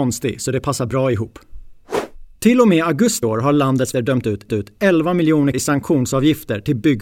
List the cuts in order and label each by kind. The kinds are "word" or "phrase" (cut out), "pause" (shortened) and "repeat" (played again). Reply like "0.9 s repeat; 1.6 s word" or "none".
2.3 s pause; 3.2 s word; 3.9 s word; 4.5 s repeat; 5.5 s word

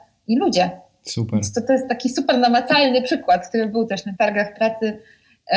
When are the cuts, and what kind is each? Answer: 4.2 s word

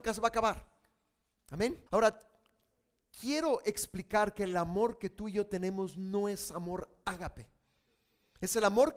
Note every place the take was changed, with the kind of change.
1.9 s pause

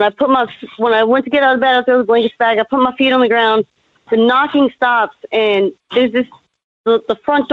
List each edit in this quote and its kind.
none

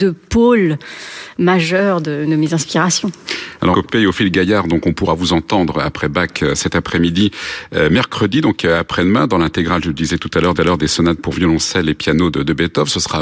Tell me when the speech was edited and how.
3.7 s word; 10.6 s repeat

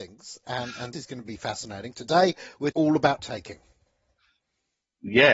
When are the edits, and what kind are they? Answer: 0.9 s word; 2.7 s word; 3.2 s word

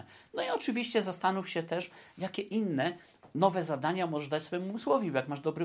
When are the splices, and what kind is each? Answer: none

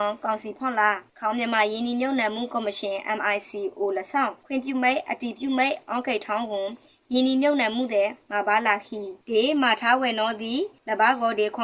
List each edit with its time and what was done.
none

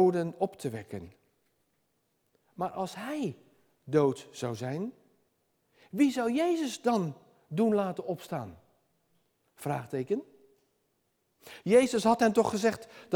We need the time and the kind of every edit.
none

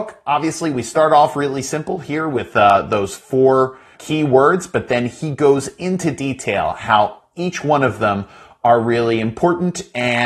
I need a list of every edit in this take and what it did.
4.0 s word

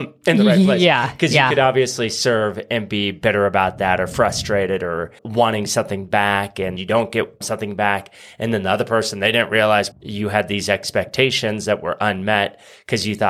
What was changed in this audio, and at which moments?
5.2 s word; 6.8 s word; 7.4 s word; 9.9 s word

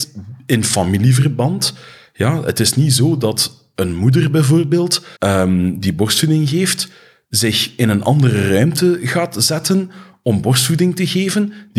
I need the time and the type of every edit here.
5.2 s pause

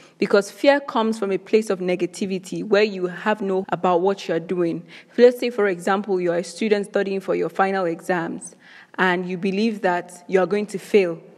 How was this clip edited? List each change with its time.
3.6 s word

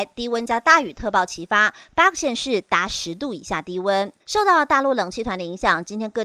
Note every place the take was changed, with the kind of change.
4.2 s pause

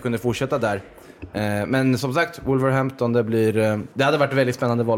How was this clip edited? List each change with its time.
3.9 s pause

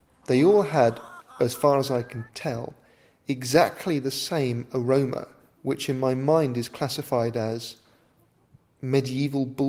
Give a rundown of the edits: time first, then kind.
none

